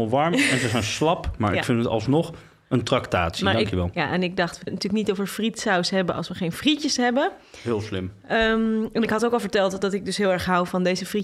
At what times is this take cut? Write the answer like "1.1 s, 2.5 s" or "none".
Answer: 4.7 s